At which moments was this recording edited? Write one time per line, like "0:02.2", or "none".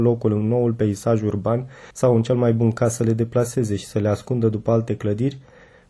0:01.9